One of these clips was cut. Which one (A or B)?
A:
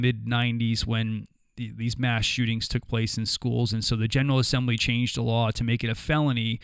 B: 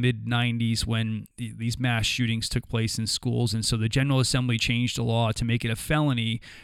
B